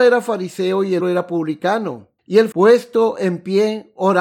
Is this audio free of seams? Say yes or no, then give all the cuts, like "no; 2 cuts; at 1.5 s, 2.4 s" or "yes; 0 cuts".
no; 3 cuts; at 1.0 s, 2.2 s, 2.5 s